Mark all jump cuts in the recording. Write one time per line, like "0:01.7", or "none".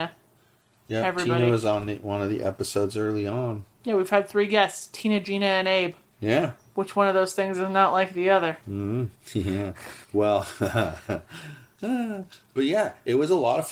0:03.7
0:06.1
0:09.2
0:10.0